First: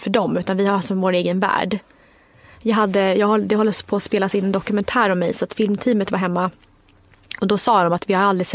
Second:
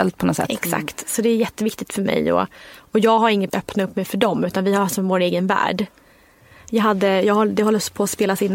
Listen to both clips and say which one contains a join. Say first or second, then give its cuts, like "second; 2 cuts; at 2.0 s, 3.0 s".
second; 1 cut; at 3.5 s